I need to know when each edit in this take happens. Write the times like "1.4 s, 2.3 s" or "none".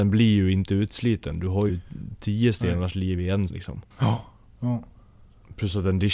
1.7 s, 3.5 s, 3.9 s